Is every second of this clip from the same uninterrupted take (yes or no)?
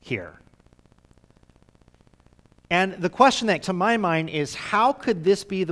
no